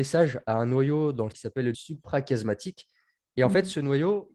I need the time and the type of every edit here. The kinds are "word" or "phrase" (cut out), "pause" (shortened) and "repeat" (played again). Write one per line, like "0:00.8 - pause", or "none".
0:01.3 - word
0:01.7 - word